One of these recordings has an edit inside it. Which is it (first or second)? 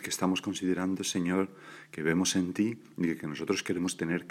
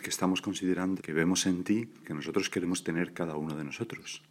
second